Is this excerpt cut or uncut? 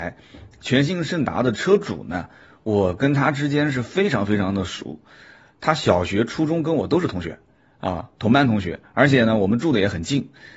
uncut